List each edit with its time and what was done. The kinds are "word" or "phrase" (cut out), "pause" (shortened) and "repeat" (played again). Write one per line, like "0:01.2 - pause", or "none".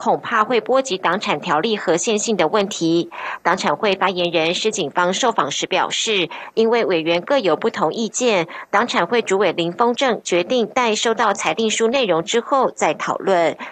none

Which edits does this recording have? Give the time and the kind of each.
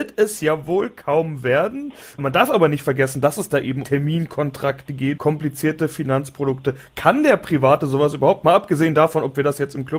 0:03.8 - word
0:05.2 - word

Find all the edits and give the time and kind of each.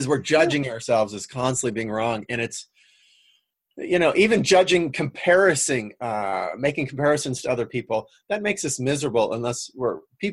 none

